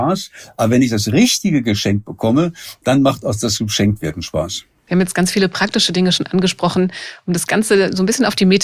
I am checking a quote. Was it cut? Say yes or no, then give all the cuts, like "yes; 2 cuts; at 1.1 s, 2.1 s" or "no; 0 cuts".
no; 0 cuts